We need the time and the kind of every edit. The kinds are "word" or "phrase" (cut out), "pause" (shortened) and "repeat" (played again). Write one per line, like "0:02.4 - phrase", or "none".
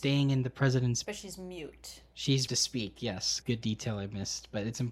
0:01.0 - word
0:02.5 - word
0:03.4 - word